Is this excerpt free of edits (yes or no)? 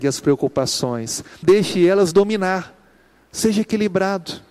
no